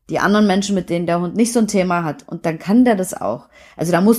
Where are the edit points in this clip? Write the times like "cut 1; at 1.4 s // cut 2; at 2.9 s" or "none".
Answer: none